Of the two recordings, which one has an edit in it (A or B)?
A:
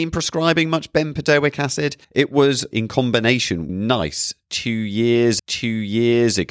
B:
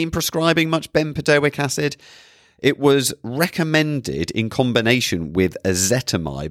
A